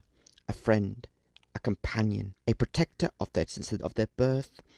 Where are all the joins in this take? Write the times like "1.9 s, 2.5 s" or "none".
2.4 s, 3.5 s, 3.8 s